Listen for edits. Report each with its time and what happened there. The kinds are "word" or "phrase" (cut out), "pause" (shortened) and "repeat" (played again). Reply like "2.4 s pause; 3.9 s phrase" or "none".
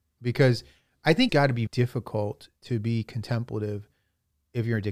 1.3 s word; 1.7 s word